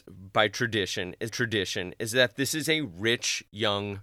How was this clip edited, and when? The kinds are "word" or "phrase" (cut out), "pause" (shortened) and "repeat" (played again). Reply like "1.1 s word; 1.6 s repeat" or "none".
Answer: 1.3 s repeat